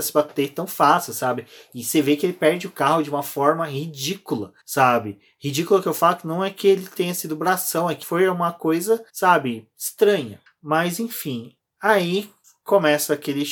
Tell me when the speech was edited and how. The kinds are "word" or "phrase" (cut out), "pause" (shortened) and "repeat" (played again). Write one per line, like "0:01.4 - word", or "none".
0:04.6 - pause
0:08.0 - word
0:09.1 - pause